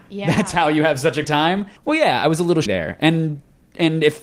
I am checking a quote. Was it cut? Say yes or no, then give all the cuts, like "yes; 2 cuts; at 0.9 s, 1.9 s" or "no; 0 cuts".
yes; 3 cuts; at 1.2 s, 1.8 s, 2.7 s